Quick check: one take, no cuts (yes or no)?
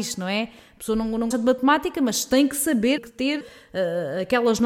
no